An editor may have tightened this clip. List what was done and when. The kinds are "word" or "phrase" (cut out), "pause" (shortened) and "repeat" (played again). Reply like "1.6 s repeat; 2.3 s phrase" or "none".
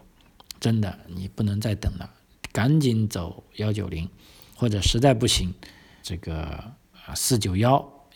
4.6 s word; 6.0 s word

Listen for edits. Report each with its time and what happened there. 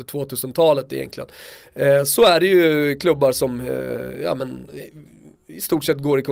none

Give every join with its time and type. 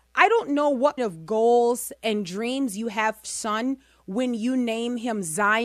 1.0 s word; 3.2 s word

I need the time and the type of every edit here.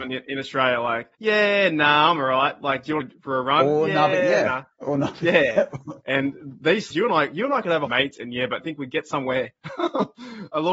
1.1 s pause; 3.0 s phrase; 6.0 s pause; 6.9 s word; 7.9 s phrase; 8.6 s phrase

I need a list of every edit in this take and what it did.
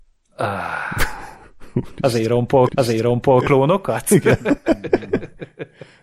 2.7 s repeat

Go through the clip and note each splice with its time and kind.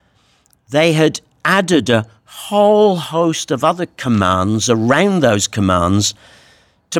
none

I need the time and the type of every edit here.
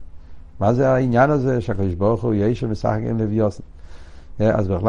none

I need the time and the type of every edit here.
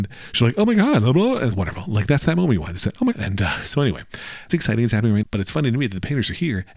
1.5 s word; 3.1 s word; 4.5 s word; 5.2 s word

